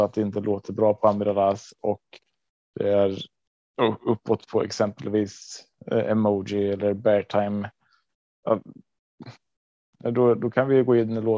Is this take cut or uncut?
uncut